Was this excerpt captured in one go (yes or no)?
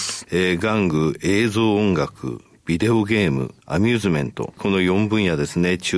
no